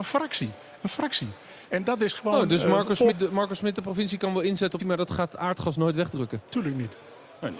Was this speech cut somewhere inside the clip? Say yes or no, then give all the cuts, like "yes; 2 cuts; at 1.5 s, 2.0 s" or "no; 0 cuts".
yes; 3 cuts; at 1.6 s, 3.1 s, 4.8 s